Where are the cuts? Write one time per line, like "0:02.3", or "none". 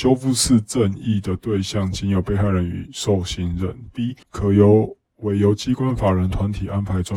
0:04.2